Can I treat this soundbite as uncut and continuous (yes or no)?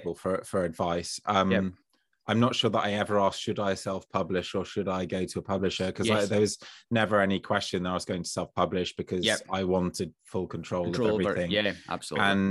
yes